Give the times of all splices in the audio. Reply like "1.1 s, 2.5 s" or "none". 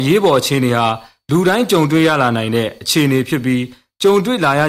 none